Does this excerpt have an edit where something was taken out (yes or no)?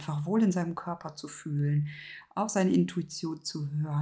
no